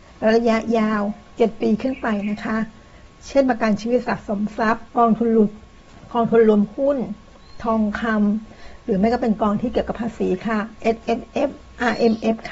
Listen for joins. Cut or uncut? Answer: cut